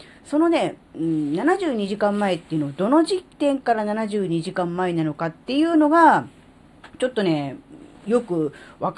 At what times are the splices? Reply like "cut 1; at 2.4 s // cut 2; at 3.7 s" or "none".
cut 1; at 3.3 s // cut 2; at 6.9 s // cut 3; at 8.0 s